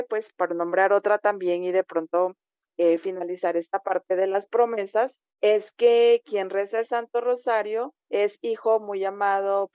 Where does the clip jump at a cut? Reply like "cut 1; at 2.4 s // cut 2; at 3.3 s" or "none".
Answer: cut 1; at 5.3 s // cut 2; at 8.0 s